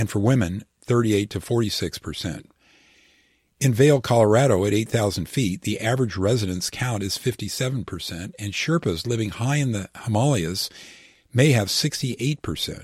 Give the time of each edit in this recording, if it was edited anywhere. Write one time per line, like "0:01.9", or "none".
none